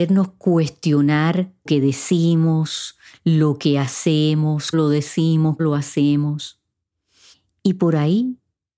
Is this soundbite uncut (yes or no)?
no